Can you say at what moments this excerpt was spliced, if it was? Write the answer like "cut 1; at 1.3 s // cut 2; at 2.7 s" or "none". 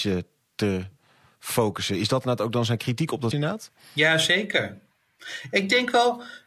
cut 1; at 3.3 s